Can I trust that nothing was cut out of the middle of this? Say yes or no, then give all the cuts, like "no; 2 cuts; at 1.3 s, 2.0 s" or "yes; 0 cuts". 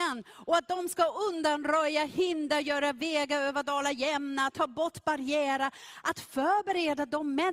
yes; 0 cuts